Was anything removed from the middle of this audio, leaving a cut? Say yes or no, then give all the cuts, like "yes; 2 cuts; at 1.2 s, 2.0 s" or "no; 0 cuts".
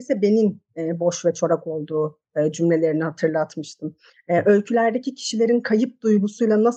no; 0 cuts